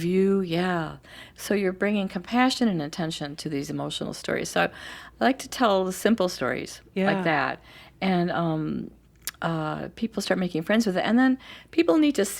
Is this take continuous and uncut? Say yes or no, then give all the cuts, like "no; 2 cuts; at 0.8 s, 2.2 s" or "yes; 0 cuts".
yes; 0 cuts